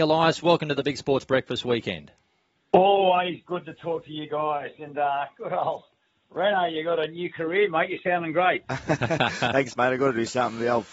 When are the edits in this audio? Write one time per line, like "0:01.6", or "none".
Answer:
none

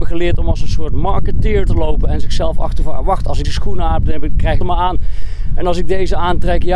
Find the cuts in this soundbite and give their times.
0:01.7
0:03.4
0:04.6

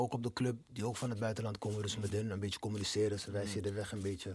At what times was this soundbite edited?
none

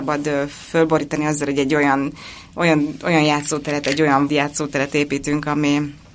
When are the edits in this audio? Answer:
0:04.3

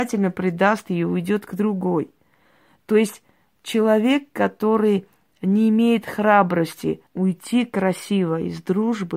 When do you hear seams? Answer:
0:07.1

